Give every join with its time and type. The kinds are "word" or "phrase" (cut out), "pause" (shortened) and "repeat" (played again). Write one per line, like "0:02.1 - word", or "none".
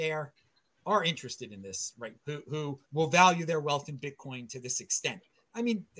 0:02.1 - word
0:02.8 - pause